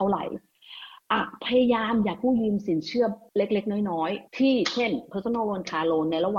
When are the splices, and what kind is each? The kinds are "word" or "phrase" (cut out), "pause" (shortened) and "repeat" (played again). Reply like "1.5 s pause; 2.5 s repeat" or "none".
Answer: none